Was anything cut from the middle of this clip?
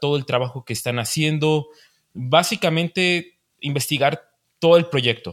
no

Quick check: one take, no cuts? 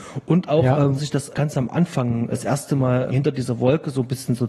no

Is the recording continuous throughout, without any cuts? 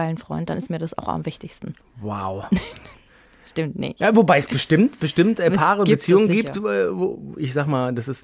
yes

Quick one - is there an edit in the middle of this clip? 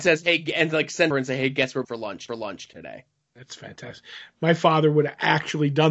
yes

